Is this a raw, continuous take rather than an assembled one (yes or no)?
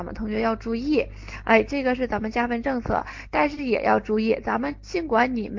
yes